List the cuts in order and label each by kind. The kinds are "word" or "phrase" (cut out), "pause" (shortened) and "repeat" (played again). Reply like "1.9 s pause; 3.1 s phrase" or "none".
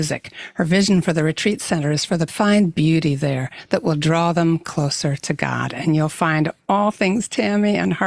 2.3 s phrase

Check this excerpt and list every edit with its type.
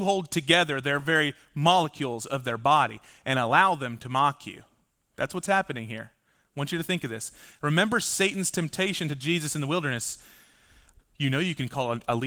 none

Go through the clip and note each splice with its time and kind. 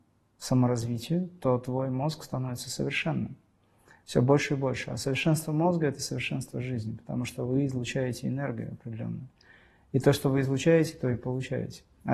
none

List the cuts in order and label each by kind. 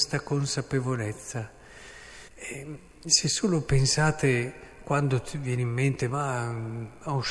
2.3 s pause

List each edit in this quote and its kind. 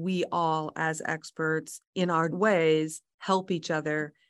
1.8 s pause; 2.3 s word

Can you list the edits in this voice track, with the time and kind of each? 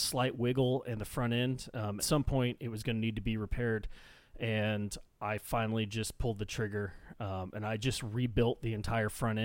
2.0 s phrase

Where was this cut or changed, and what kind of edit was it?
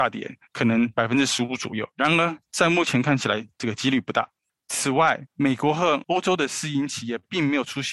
1.9 s pause; 4.4 s pause

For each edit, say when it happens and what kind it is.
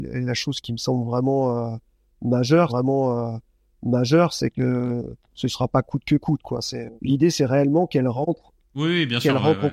2.7 s repeat; 5.2 s pause; 7.0 s pause

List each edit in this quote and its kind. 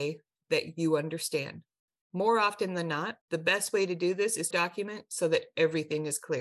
1.9 s pause; 3.2 s pause; 4.5 s phrase

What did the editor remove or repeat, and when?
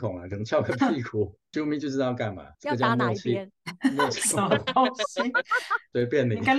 1.5 s pause; 2.5 s pause

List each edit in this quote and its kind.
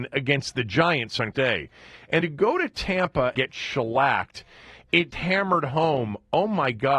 1.3 s word; 2.2 s word; 3.4 s word; 5.1 s word

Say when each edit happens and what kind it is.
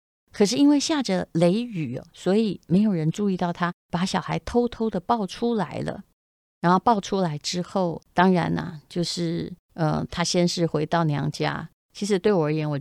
3.8 s pause; 8.0 s pause; 9.6 s pause

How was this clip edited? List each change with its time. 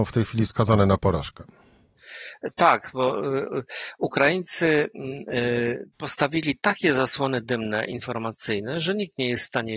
5.9 s pause

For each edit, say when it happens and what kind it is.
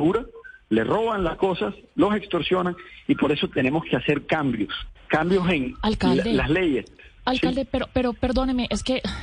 none

